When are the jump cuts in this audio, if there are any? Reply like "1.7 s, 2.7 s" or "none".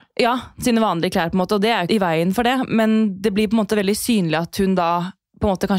1.9 s